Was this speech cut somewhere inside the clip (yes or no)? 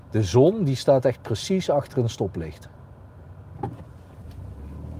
no